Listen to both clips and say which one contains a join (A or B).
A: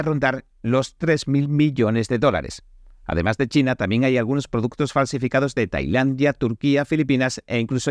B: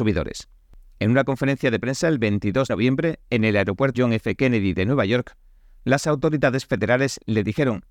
B